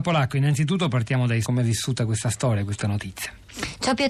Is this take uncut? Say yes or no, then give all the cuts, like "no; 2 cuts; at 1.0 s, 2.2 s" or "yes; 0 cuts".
no; 2 cuts; at 1.4 s, 2.8 s